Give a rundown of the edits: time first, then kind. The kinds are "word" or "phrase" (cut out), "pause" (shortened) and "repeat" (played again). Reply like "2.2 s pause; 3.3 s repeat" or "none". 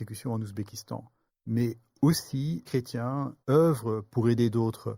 1.3 s pause; 2.7 s word; 3.4 s pause